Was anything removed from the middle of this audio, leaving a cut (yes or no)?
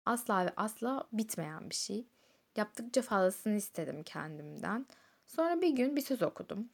no